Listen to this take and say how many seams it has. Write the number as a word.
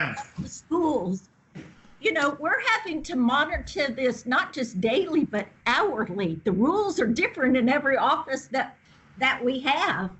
zero